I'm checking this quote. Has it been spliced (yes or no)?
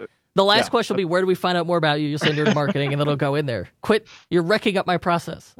no